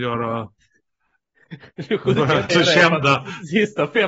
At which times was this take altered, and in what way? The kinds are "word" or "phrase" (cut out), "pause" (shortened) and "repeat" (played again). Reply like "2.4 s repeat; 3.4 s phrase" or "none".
2.5 s word